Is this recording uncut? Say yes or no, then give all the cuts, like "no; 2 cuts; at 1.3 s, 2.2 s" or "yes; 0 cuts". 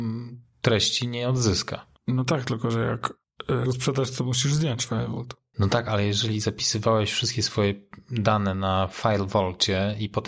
no; 1 cut; at 3.7 s